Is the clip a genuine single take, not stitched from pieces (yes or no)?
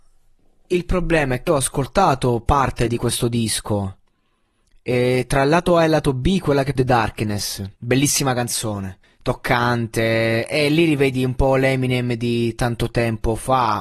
no